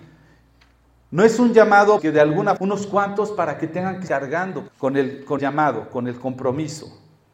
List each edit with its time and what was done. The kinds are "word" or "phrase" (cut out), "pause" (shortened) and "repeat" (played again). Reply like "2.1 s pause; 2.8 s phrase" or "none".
2.0 s phrase; 2.6 s word; 4.1 s word; 4.7 s word; 5.4 s word